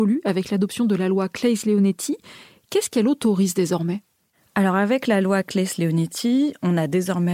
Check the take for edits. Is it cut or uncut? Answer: uncut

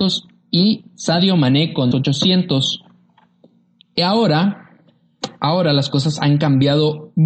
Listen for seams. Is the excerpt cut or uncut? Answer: cut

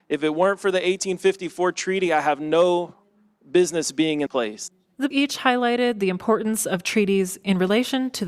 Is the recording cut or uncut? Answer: cut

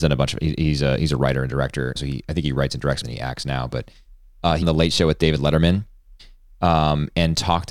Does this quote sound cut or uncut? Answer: cut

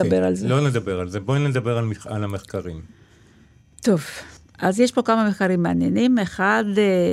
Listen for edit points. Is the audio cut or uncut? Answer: cut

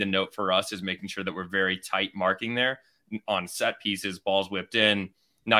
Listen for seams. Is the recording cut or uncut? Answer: uncut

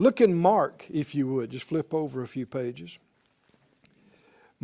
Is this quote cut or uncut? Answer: uncut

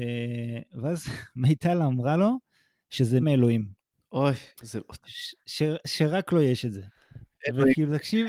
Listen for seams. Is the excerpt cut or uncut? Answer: cut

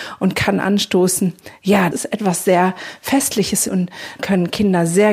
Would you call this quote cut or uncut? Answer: cut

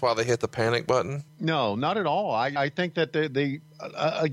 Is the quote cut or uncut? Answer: cut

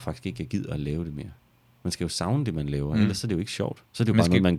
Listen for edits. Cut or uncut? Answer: uncut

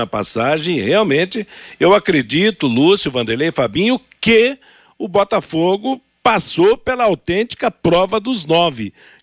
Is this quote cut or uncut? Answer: uncut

